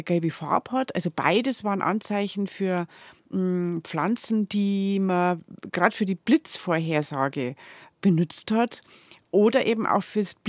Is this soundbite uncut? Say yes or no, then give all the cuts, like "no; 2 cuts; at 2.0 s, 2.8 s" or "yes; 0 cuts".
yes; 0 cuts